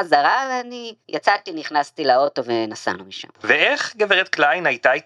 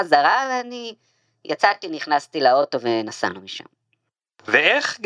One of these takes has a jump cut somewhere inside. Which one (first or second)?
first